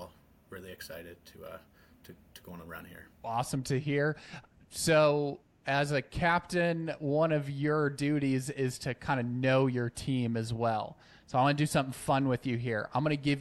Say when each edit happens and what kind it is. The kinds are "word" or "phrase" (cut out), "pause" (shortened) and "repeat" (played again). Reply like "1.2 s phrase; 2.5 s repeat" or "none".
3.1 s pause